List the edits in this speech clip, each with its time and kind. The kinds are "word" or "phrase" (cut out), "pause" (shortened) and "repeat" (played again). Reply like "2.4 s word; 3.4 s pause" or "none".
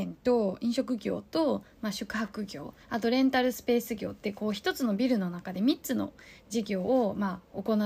2.8 s pause